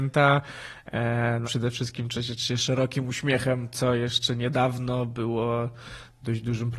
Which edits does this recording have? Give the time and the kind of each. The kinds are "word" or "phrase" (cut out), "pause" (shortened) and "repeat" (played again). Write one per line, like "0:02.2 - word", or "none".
0:01.4 - word